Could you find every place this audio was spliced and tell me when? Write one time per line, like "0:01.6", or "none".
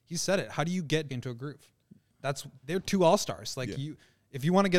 0:01.1
0:02.5